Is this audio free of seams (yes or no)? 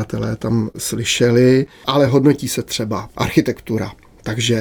yes